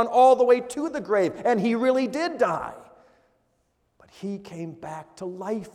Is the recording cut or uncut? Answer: uncut